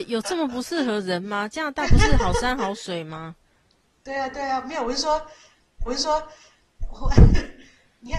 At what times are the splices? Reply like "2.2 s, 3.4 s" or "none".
3.5 s, 5.9 s

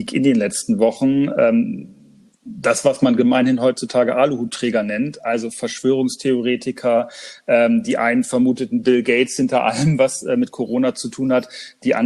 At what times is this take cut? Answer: none

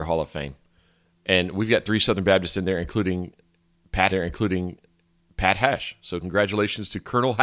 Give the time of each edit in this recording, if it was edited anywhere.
4.1 s

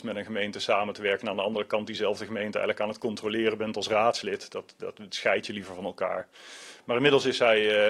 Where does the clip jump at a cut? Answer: none

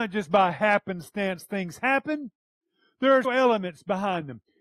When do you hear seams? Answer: 3.2 s

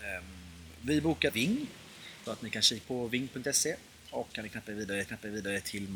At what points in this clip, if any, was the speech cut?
1.3 s, 2.3 s, 2.8 s, 4.3 s, 5.1 s

